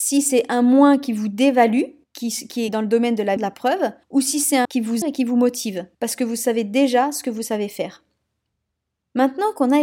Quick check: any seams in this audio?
yes; 7 cuts; at 2.0 s, 2.7 s, 3.4 s, 4.0 s, 4.6 s, 5.0 s, 5.9 s

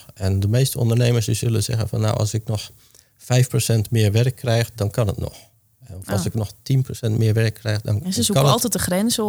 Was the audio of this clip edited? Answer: no; 0 cuts

